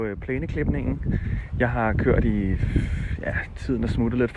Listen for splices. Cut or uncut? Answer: uncut